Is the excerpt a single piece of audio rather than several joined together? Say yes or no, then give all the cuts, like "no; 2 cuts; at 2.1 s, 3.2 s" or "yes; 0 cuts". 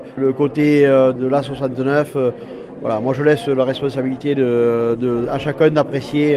yes; 0 cuts